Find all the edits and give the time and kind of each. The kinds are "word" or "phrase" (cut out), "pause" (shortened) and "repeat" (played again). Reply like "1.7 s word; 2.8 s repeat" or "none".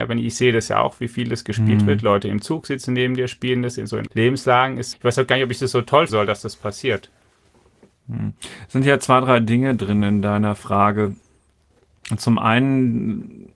4.1 s word; 4.9 s word; 6.1 s word